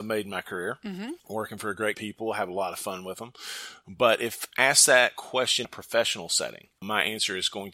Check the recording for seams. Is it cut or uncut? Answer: cut